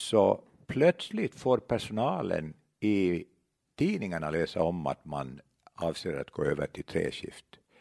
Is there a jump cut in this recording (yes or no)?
no